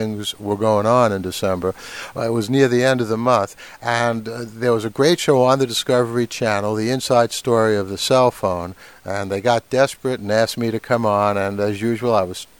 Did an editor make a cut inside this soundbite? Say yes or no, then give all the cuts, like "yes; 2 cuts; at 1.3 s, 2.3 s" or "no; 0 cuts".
no; 0 cuts